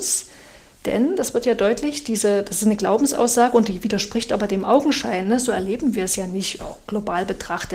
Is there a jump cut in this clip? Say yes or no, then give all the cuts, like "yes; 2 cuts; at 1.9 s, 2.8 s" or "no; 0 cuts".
no; 0 cuts